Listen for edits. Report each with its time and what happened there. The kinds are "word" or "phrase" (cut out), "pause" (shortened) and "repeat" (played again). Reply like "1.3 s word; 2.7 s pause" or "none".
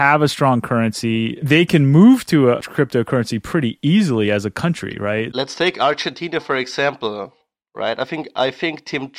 none